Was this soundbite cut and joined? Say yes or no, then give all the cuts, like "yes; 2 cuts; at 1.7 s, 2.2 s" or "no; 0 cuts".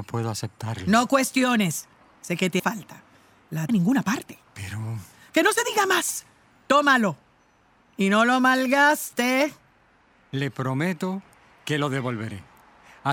yes; 2 cuts; at 2.6 s, 3.7 s